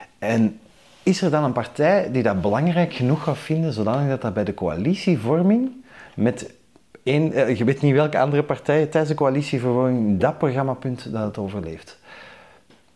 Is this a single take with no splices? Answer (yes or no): yes